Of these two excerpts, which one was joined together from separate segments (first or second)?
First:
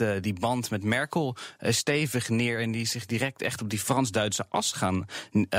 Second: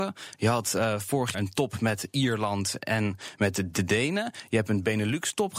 second